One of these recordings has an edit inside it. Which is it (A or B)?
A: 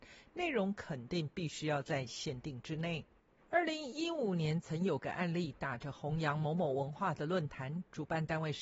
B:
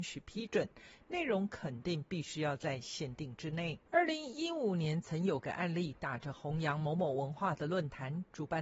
B